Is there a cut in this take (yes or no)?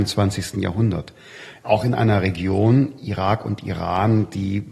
no